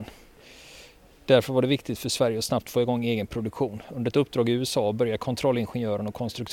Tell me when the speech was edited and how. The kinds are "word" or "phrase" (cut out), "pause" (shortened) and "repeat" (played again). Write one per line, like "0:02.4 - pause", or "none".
none